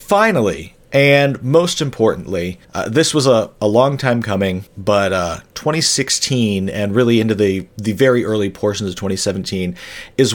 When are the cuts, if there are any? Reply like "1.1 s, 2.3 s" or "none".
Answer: 2.6 s, 4.7 s